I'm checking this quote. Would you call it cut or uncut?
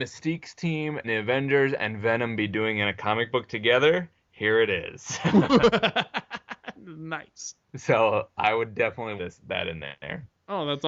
cut